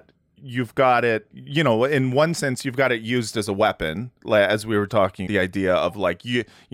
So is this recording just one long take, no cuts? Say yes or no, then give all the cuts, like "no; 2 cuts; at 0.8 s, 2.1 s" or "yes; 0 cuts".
no; 2 cuts; at 4.9 s, 5.3 s